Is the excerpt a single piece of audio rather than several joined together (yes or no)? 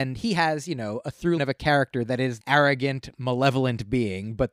no